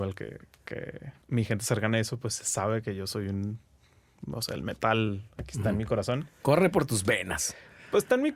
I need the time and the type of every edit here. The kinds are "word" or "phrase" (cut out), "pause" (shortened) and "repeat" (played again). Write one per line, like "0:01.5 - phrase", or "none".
0:01.2 - pause